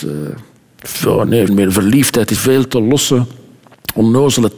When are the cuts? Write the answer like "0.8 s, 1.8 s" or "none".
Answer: 1.5 s, 2.4 s